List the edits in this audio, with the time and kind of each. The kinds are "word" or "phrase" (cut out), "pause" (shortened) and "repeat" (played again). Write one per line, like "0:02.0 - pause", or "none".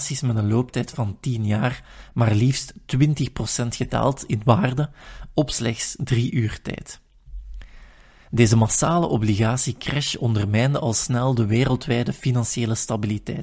none